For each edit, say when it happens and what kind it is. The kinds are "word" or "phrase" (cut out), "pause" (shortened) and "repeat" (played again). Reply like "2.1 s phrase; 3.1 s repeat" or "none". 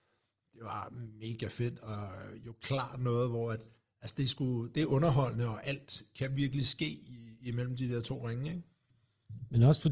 none